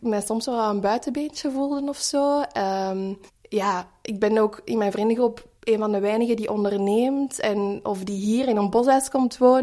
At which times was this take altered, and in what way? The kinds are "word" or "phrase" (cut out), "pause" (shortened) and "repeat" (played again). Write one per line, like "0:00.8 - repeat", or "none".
0:03.3 - pause
0:05.6 - pause